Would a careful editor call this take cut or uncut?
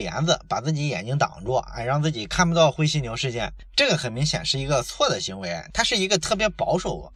uncut